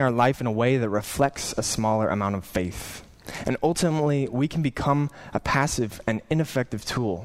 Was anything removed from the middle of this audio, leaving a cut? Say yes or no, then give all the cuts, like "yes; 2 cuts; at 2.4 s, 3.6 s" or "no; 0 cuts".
no; 0 cuts